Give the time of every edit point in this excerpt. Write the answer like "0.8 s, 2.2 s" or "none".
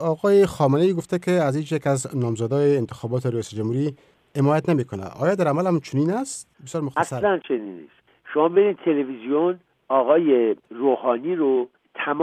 6.5 s, 10.6 s

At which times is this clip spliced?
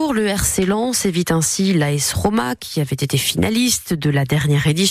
none

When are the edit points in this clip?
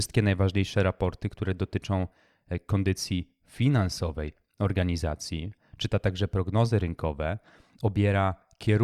none

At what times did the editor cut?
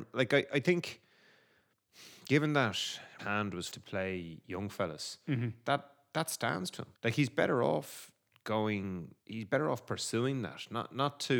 3.2 s, 3.7 s, 7.0 s, 9.2 s

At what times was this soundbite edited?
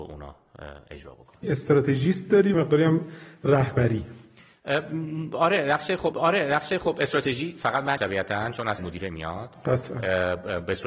1.4 s, 2.5 s, 6.1 s, 8.0 s, 8.8 s

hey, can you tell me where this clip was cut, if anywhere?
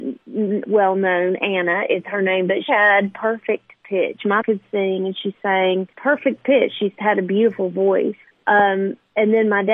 2.7 s, 4.4 s, 5.9 s, 8.2 s

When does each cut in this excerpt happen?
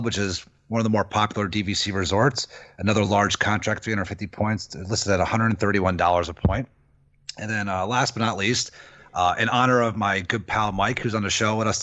none

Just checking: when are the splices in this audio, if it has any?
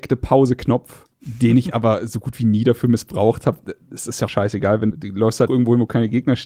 1.1 s, 4.3 s, 4.9 s, 5.5 s

